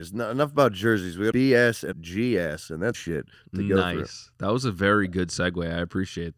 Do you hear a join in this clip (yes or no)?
yes